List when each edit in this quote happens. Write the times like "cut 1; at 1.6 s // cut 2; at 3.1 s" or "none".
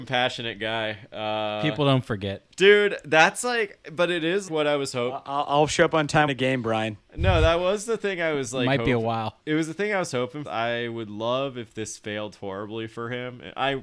cut 1; at 2.5 s // cut 2; at 4.5 s // cut 3; at 6.3 s // cut 4; at 9.4 s // cut 5; at 10.4 s